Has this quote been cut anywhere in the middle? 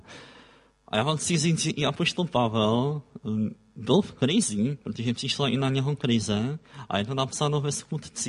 no; 0 cuts

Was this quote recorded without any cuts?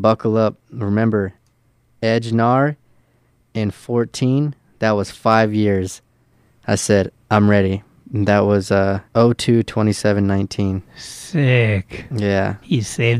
no; 1 cut; at 9.1 s

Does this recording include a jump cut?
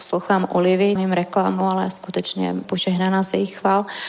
yes; 2 cuts; at 1.0 s, 2.6 s

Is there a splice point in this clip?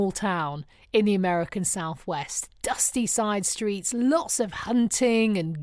no; 0 cuts

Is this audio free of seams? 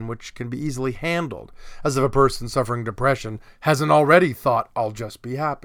yes; 0 cuts

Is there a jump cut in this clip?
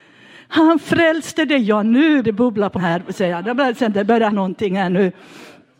yes; 3 cuts; at 2.2 s, 2.8 s, 4.3 s

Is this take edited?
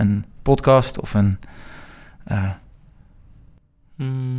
no; 0 cuts

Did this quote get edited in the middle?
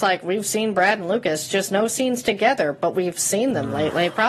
no; 0 cuts

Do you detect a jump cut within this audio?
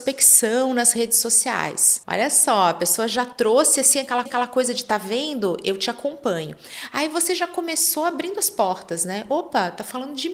yes; 1 cut; at 4.3 s

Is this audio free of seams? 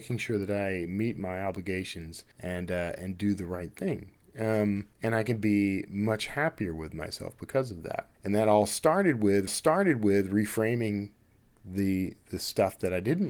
no; 4 cuts; at 2.3 s, 4.9 s, 8.1 s, 9.5 s

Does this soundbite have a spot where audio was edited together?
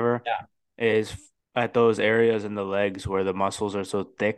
yes; 1 cut; at 1.4 s

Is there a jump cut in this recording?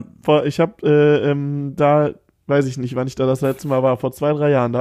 no; 0 cuts

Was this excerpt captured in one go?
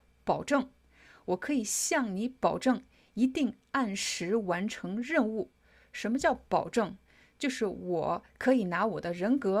yes; 0 cuts

